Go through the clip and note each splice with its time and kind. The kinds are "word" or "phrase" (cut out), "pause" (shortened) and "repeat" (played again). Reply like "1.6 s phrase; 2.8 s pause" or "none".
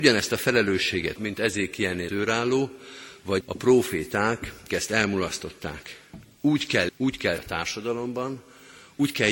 1.2 s word; 2.1 s word; 3.4 s word; 4.7 s word; 6.9 s word; 7.4 s word